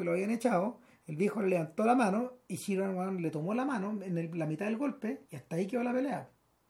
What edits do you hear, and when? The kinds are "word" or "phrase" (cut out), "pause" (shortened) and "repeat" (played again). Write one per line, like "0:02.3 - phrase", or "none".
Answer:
0:05.2 - pause